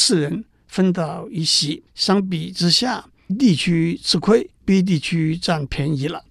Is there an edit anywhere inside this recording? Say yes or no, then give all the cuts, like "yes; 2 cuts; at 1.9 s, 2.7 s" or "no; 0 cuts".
yes; 3 cuts; at 1.9 s, 3.3 s, 4.5 s